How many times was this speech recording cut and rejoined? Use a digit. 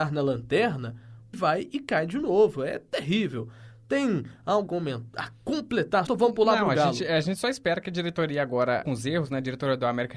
4